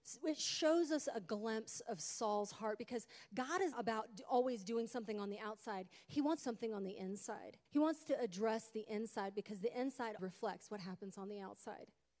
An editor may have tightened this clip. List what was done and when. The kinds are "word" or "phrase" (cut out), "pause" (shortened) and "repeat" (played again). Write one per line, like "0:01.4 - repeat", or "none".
0:03.7 - word
0:06.4 - phrase
0:07.7 - pause
0:10.2 - word